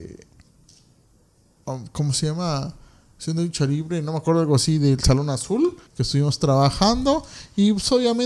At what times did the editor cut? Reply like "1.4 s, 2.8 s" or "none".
5.9 s